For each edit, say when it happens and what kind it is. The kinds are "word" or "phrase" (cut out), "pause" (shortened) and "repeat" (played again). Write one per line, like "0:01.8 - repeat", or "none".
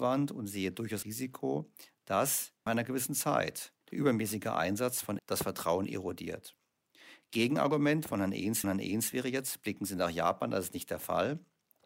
0:01.0 - word
0:02.7 - word
0:03.8 - pause
0:05.2 - word
0:08.6 - repeat